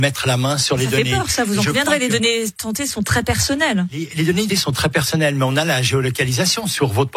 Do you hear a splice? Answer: yes; 1 cut; at 4.5 s

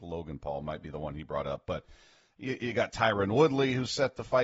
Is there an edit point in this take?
no; 0 cuts

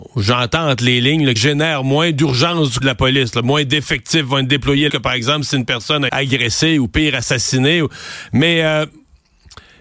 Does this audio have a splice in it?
yes; 4 cuts; at 1.4 s, 2.8 s, 4.9 s, 6.1 s

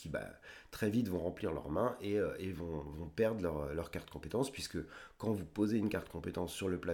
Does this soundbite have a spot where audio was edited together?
no; 0 cuts

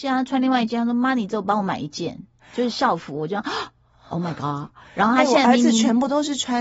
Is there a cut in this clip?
no; 0 cuts

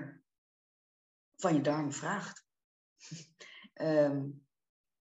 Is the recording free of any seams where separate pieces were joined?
no; 1 cut; at 3.7 s

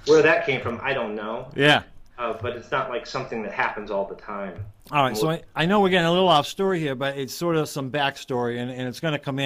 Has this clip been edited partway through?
yes; 1 cut; at 4.8 s

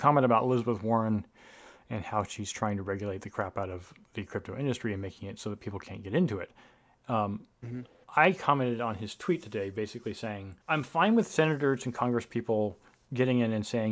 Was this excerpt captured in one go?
no; 1 cut; at 10.6 s

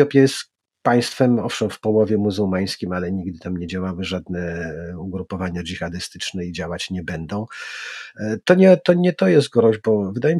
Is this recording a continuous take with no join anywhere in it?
yes; 0 cuts

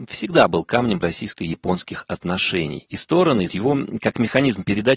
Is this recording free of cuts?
no; 2 cuts; at 1.0 s, 3.5 s

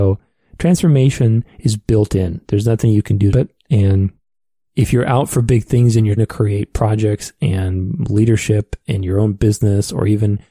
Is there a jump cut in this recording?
yes; 2 cuts; at 3.3 s, 6.2 s

